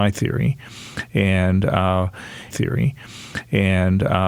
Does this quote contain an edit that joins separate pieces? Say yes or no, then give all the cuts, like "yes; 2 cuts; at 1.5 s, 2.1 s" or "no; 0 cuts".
yes; 1 cut; at 2.5 s